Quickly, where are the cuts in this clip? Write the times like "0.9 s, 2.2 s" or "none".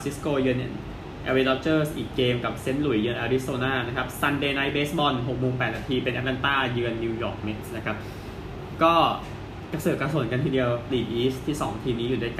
10.9 s

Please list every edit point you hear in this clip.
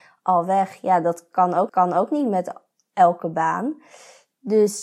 1.7 s

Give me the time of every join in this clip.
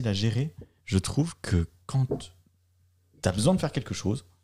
none

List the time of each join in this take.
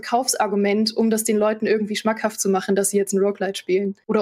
none

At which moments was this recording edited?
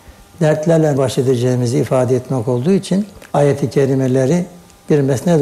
1.0 s, 3.3 s

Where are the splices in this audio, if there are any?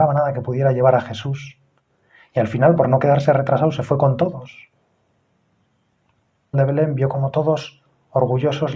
6.5 s

